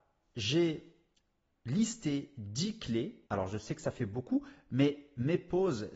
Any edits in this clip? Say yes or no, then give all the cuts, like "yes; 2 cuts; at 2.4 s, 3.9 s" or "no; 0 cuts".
yes; 1 cut; at 3.3 s